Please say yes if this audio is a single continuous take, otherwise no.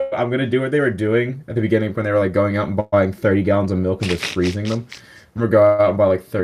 no